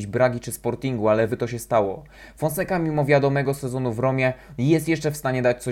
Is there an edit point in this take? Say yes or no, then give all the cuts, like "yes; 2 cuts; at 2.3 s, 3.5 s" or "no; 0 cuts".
yes; 1 cut; at 1.3 s